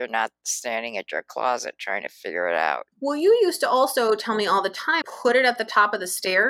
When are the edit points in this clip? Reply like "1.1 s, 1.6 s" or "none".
2.9 s, 5.0 s